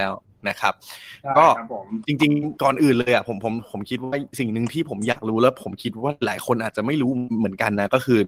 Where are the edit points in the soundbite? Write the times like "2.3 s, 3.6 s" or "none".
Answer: 2.6 s